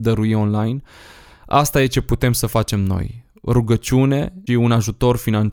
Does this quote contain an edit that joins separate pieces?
yes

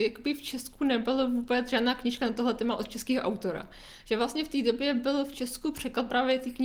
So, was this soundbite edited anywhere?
no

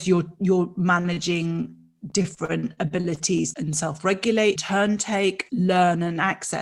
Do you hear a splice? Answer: yes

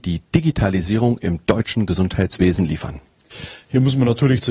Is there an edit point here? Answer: no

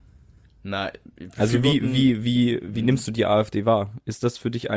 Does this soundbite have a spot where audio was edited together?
no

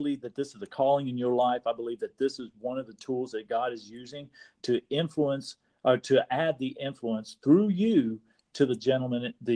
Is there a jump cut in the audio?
no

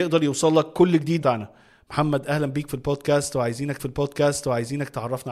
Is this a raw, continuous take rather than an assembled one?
no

